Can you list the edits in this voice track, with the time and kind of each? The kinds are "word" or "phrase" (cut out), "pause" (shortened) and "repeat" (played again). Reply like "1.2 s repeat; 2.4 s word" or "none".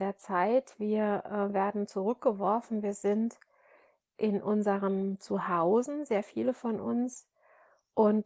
none